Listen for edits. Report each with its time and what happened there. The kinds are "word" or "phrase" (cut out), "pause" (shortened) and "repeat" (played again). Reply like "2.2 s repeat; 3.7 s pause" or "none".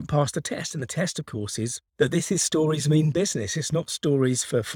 1.9 s pause